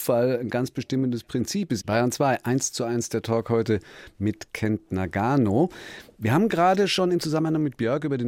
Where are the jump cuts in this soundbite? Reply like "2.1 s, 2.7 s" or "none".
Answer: none